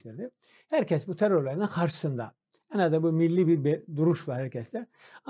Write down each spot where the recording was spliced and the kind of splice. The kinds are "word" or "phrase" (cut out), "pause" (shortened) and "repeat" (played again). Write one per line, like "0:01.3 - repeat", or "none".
none